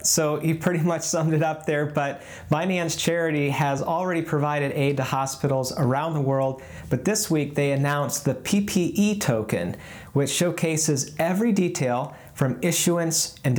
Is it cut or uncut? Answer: uncut